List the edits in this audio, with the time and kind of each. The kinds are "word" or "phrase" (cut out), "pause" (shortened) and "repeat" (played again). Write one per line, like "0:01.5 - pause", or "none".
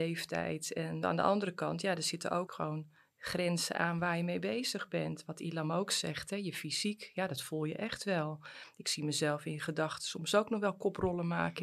0:01.0 - word
0:02.5 - word